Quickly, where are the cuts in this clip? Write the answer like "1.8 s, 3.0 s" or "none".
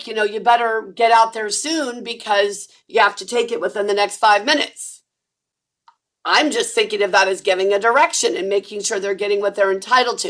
none